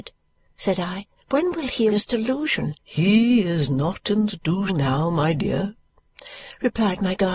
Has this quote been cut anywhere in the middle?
yes; 5 cuts; at 1.2 s, 1.9 s, 2.8 s, 4.3 s, 4.7 s

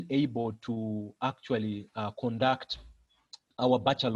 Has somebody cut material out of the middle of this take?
no; 0 cuts

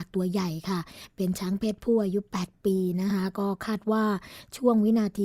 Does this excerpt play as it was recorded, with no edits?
yes; 0 cuts

